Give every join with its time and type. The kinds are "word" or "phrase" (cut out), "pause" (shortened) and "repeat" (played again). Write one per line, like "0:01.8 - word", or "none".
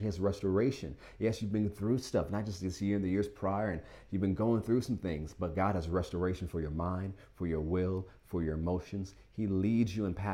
none